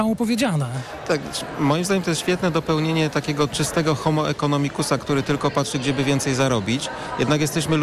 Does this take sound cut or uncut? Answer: uncut